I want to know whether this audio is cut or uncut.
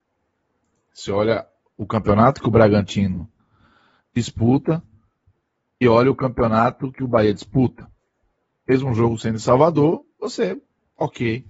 uncut